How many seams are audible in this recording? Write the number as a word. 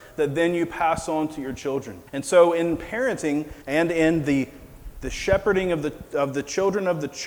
two